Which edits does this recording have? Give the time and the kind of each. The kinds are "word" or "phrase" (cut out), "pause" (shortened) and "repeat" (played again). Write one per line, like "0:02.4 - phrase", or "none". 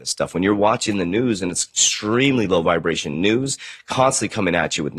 none